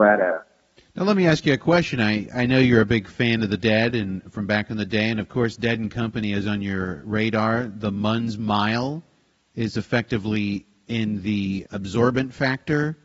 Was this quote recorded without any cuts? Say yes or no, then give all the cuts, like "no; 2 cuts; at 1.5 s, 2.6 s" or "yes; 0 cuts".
no; 1 cut; at 11.7 s